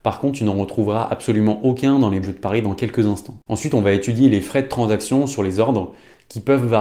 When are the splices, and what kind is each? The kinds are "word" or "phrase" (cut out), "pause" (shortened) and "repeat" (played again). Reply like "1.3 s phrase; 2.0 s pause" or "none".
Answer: 2.2 s phrase